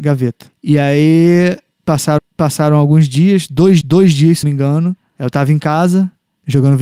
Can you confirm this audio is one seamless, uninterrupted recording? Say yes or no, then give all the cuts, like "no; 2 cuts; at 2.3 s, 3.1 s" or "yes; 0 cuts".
no; 3 cuts; at 2.2 s, 3.8 s, 4.4 s